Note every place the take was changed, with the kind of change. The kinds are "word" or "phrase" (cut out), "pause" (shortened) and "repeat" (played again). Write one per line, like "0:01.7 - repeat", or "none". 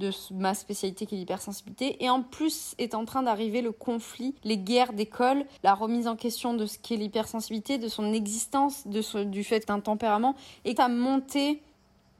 0:04.4 - pause
0:05.6 - pause
0:09.6 - word
0:10.8 - word